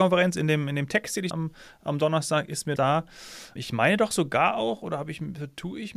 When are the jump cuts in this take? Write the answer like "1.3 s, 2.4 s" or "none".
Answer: 1.3 s, 2.8 s, 3.6 s